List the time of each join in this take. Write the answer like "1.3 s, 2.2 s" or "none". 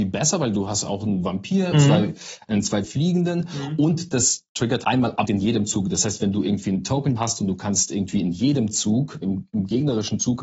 1.7 s, 2.8 s, 4.8 s, 5.3 s, 7.2 s, 9.2 s

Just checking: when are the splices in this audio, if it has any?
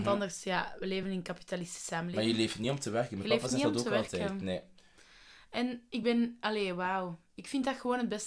none

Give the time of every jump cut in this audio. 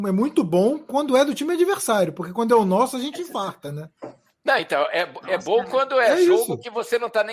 none

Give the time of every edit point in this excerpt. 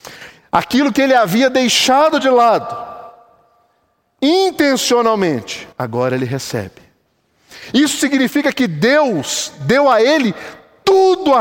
5.7 s

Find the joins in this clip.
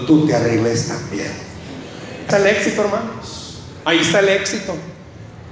2.3 s

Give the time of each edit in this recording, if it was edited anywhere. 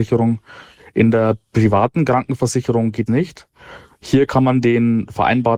3.1 s

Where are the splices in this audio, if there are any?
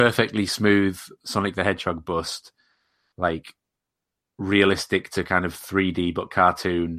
none

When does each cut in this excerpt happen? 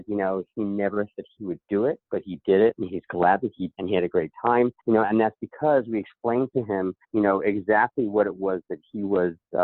1.1 s, 3.7 s, 4.8 s, 7.0 s

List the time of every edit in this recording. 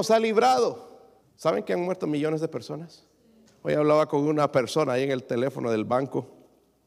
1.2 s, 3.5 s

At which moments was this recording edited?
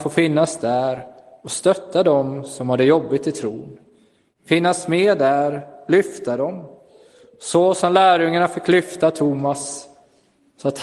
none

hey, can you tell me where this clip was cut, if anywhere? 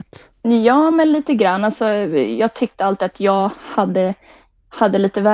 none

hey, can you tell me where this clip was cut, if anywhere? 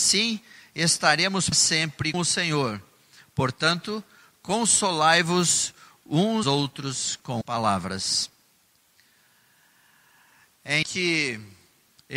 1.5 s, 2.1 s, 6.4 s, 7.4 s, 10.8 s

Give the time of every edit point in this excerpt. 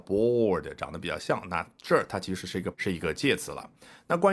2.7 s

